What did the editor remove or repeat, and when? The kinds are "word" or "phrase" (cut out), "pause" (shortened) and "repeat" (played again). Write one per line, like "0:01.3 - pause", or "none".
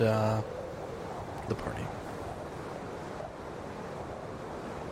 0:01.5 - word